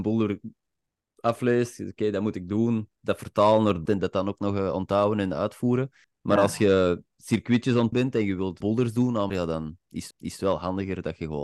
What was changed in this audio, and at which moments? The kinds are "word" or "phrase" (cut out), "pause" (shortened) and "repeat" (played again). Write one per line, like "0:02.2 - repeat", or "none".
0:03.9 - word
0:06.0 - pause
0:07.9 - word
0:08.6 - word
0:09.3 - word
0:10.1 - repeat